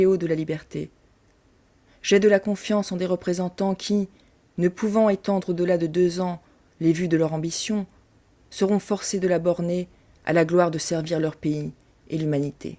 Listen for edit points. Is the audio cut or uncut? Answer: uncut